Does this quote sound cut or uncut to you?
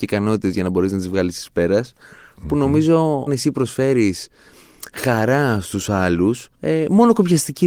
cut